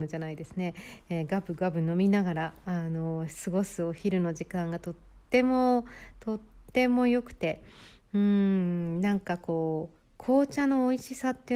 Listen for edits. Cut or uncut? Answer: uncut